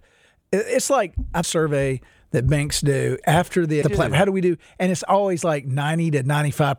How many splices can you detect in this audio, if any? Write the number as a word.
three